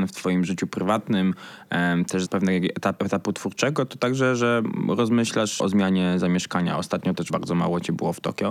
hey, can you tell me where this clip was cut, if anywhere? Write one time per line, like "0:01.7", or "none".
0:02.3
0:03.0
0:05.6
0:07.3